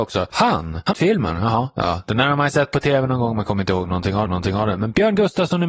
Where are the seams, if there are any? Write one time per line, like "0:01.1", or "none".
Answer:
0:00.9
0:04.3